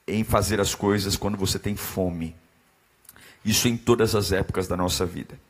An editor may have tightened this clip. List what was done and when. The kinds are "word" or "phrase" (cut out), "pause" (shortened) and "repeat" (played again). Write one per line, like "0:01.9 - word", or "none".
none